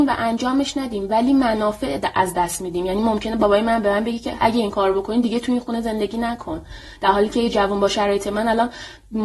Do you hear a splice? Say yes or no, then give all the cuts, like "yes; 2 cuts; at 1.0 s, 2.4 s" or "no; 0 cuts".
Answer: no; 0 cuts